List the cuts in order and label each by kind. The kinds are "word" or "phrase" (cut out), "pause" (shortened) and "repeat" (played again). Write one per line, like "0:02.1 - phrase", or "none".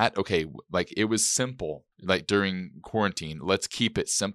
0:01.9 - pause